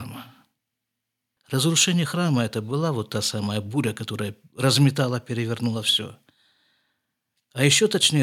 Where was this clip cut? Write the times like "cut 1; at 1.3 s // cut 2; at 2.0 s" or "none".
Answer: none

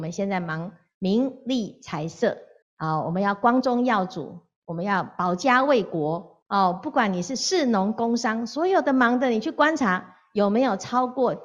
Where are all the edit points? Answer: cut 1; at 2.6 s // cut 2; at 6.4 s

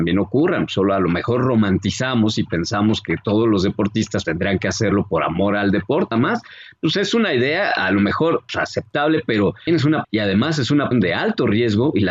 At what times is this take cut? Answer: cut 1; at 4.2 s // cut 2; at 6.1 s // cut 3; at 8.5 s // cut 4; at 9.7 s // cut 5; at 10.0 s // cut 6; at 10.9 s

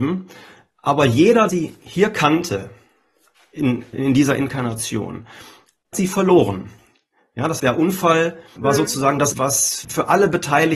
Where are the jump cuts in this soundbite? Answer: cut 1; at 1.5 s // cut 2; at 3.9 s // cut 3; at 5.9 s // cut 4; at 7.6 s // cut 5; at 8.6 s // cut 6; at 9.3 s // cut 7; at 9.8 s

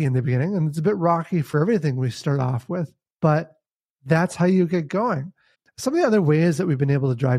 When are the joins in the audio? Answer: cut 1; at 5.5 s

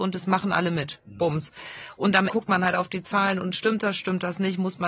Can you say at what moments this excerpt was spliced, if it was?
cut 1; at 2.3 s

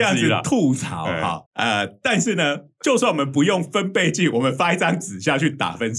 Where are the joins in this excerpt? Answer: cut 1; at 1.5 s

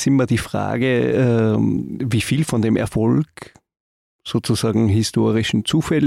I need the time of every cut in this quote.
none

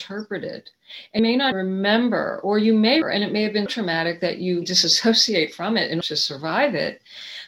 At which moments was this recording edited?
cut 1; at 1.2 s // cut 2; at 1.5 s // cut 3; at 3.0 s // cut 4; at 3.7 s // cut 5; at 4.6 s // cut 6; at 6.0 s

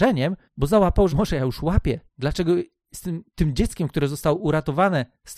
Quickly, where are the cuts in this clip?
cut 1; at 1.1 s // cut 2; at 3.3 s

